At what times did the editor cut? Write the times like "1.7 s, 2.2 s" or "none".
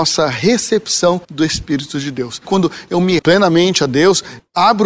1.2 s, 3.2 s